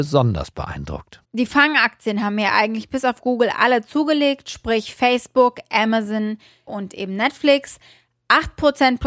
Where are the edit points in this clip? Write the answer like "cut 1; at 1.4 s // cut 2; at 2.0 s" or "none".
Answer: cut 1; at 1.2 s // cut 2; at 6.7 s